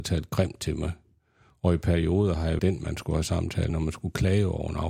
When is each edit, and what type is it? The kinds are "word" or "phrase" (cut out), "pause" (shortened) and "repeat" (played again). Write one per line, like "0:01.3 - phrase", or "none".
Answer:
0:02.6 - word
0:03.7 - word